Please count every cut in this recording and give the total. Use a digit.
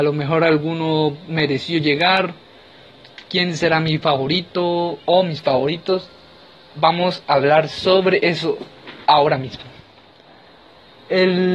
0